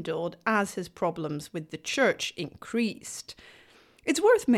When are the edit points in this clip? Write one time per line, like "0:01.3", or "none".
none